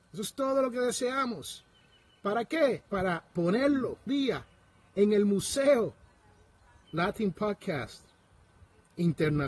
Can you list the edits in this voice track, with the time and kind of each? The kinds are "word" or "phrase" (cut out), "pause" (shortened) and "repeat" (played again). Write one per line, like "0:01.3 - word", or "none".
0:02.9 - pause
0:04.1 - word
0:06.8 - word